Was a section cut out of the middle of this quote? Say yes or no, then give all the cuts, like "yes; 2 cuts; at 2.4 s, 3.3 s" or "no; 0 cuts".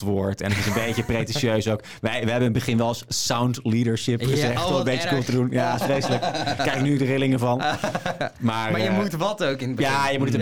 no; 0 cuts